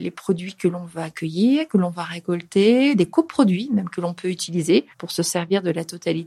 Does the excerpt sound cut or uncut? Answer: cut